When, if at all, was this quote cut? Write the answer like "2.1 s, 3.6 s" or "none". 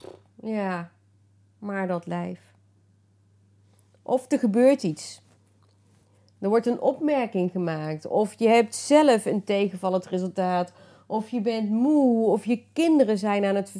none